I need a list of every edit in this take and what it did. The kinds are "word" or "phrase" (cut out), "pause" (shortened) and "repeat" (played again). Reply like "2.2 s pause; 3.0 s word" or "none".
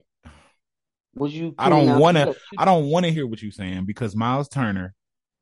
none